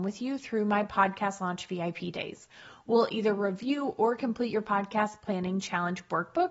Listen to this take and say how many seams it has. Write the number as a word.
zero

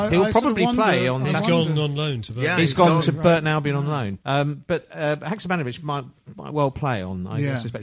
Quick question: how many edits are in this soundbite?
one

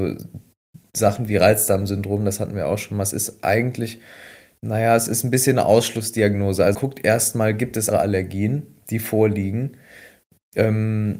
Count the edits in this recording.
two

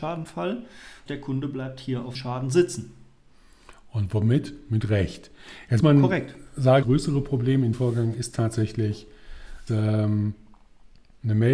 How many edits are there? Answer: six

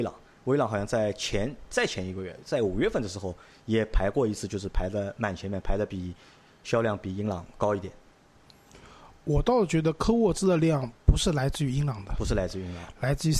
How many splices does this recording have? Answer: zero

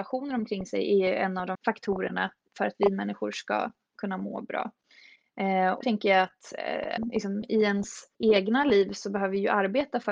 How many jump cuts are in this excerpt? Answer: four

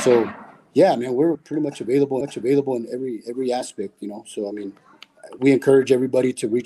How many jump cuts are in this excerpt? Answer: three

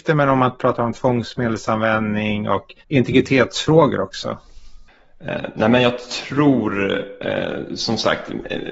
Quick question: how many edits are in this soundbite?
one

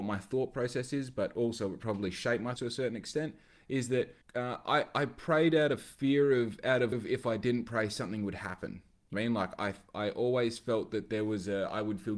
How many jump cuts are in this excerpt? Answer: four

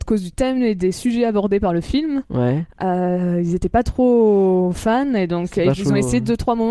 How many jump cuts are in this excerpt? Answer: zero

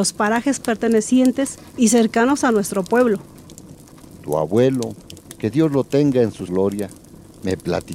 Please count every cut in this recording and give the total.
one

